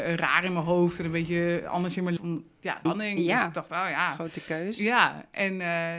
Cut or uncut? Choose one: cut